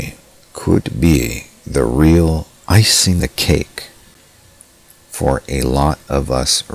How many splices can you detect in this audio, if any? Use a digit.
1